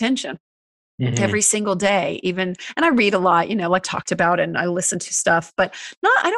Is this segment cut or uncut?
cut